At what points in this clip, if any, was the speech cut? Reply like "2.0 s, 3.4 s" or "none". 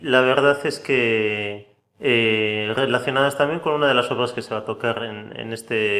none